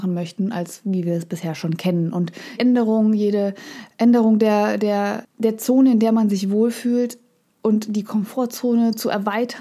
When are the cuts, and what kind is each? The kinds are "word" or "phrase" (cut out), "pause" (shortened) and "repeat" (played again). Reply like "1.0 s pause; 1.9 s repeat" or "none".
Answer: 2.6 s word; 5.2 s word